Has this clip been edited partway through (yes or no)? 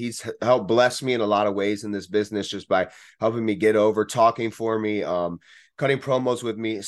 no